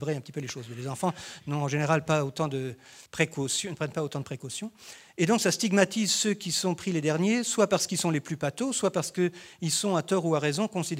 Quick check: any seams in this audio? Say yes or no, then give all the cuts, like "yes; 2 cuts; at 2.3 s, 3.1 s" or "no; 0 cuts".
yes; 1 cut; at 3.1 s